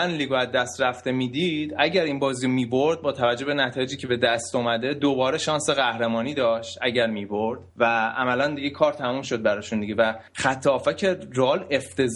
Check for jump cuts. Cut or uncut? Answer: cut